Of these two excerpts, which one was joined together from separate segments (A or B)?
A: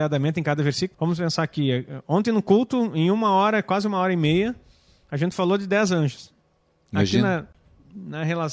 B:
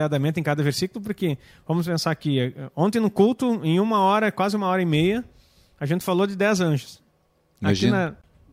A